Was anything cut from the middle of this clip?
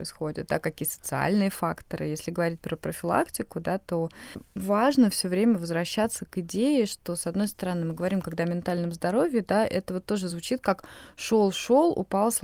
no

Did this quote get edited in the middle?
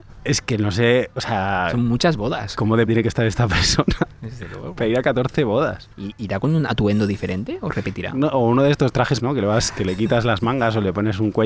yes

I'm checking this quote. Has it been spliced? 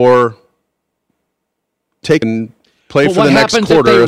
yes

